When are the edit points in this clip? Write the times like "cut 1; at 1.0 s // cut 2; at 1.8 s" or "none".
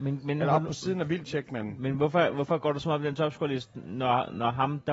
none